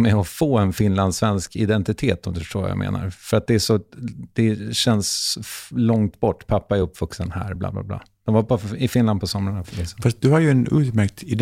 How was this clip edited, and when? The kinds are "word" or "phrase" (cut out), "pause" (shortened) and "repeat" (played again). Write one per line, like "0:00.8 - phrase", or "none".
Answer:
none